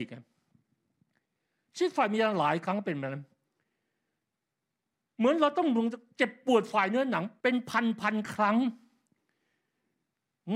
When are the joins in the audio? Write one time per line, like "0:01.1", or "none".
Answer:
0:07.4